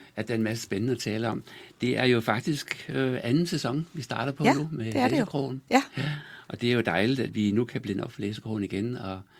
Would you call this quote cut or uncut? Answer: uncut